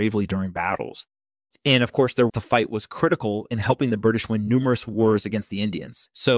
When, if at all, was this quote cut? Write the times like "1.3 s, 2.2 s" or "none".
2.3 s